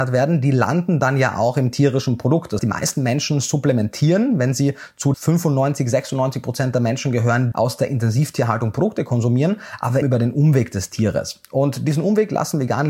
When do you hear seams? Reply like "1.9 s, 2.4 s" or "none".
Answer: 2.6 s, 5.1 s, 7.5 s, 10.0 s